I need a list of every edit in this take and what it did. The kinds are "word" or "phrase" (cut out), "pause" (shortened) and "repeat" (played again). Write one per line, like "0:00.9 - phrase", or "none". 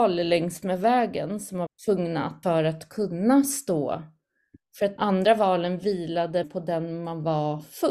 0:01.7 - word
0:02.4 - word
0:05.0 - word
0:06.4 - word